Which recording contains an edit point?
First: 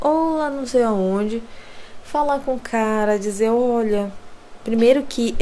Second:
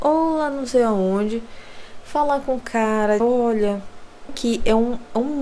second; 2 cuts; at 3.2 s, 4.3 s

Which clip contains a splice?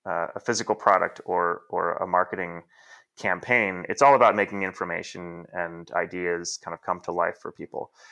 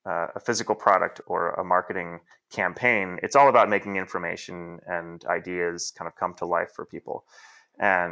second; 2 cuts; at 1.2 s, 2.3 s

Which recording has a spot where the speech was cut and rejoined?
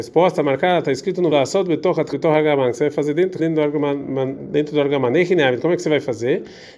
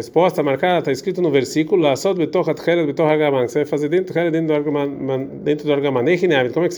first; 3 cuts; at 1.3 s, 2.1 s, 3.4 s

